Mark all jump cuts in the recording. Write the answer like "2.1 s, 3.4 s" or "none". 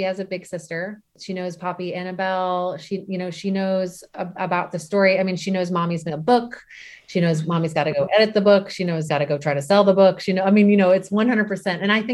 6.1 s, 9.1 s